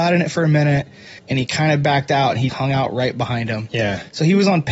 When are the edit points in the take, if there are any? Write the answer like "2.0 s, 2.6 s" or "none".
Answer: 1.2 s, 2.5 s